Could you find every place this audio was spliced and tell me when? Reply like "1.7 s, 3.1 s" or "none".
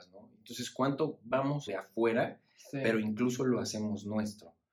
1.7 s